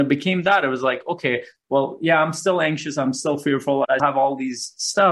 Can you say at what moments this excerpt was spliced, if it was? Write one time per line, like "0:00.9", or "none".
0:04.0